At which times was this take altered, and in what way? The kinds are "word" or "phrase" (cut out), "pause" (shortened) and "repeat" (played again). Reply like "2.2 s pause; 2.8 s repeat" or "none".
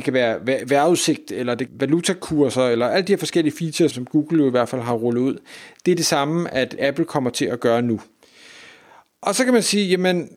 1.7 s phrase; 3.9 s word; 6.8 s word